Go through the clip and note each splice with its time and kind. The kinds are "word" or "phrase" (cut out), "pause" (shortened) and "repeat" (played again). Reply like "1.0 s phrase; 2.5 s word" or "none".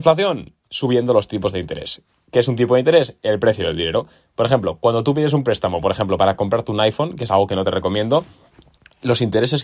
none